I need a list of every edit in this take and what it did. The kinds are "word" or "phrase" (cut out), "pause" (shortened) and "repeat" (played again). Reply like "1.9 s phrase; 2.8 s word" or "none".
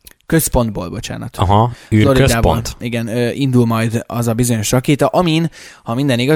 none